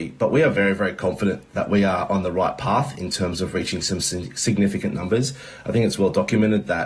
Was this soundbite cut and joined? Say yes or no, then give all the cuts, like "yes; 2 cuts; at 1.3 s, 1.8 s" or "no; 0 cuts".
no; 0 cuts